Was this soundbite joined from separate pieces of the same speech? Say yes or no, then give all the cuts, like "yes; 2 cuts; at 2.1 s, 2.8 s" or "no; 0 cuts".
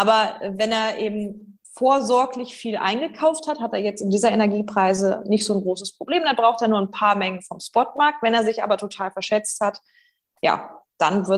yes; 1 cut; at 1.6 s